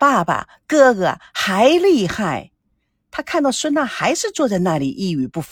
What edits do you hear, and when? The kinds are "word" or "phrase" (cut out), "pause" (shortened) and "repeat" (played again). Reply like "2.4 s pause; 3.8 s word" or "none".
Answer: none